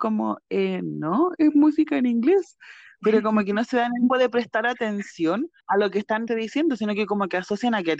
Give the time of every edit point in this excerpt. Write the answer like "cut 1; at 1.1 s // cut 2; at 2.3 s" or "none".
cut 1; at 4.1 s // cut 2; at 5.6 s // cut 3; at 6.3 s